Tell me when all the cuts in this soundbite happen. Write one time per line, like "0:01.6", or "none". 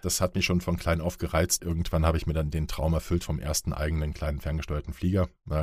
0:01.6